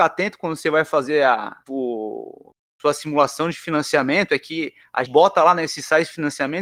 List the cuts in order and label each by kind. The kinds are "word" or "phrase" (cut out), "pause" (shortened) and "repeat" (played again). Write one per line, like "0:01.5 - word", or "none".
0:01.7 - word
0:05.0 - word